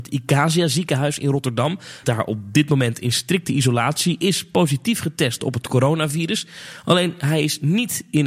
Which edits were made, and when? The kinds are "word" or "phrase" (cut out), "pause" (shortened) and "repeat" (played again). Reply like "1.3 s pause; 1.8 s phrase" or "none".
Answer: 2.0 s word